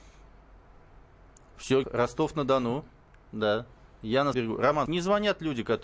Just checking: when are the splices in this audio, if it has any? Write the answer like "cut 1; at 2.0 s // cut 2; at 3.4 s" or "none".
cut 1; at 1.8 s // cut 2; at 4.3 s // cut 3; at 4.9 s